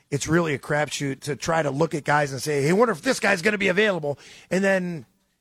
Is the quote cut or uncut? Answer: cut